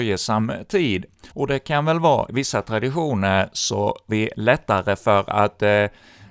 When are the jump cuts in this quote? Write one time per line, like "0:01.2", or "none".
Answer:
0:01.3
0:02.3
0:04.1